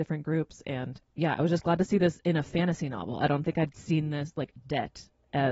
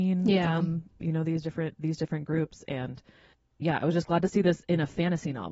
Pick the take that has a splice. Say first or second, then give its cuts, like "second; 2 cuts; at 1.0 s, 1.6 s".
first; 1 cut; at 1.0 s